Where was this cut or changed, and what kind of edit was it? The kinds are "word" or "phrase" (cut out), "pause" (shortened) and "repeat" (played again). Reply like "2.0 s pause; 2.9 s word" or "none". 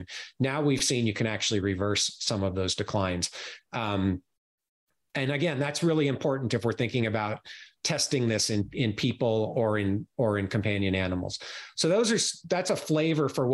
none